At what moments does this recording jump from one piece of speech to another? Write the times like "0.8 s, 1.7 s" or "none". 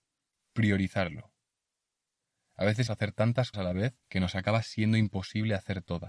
2.9 s, 3.5 s, 4.0 s